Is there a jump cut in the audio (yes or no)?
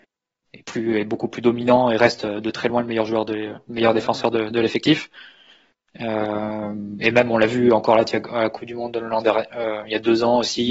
no